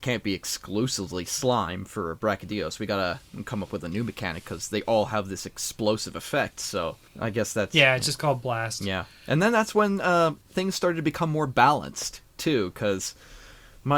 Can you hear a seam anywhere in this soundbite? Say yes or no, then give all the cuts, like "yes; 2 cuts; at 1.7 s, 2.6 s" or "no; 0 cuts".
yes; 2 cuts; at 7.1 s, 10.4 s